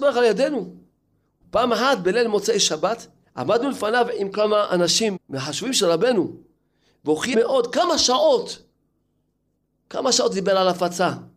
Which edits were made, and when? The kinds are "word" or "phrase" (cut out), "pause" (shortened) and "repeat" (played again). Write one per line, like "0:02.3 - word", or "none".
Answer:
0:03.2 - pause
0:05.2 - phrase
0:07.3 - word